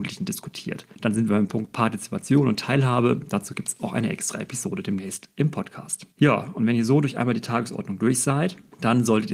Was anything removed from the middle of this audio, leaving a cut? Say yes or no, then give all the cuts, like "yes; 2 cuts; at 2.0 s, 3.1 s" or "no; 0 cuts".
yes; 1 cut; at 6.1 s